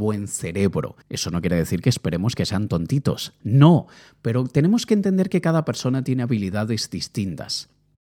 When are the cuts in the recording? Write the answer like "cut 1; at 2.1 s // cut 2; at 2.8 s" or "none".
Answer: cut 1; at 1.0 s